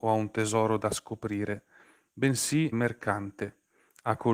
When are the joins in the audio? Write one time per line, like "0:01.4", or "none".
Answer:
0:02.7